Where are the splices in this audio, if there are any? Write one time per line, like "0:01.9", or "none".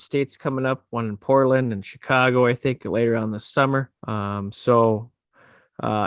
0:04.0